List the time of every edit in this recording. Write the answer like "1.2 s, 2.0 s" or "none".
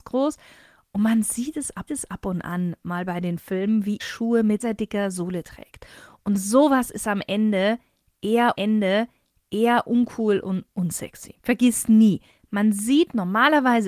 1.9 s, 4.0 s, 4.6 s, 8.5 s, 11.4 s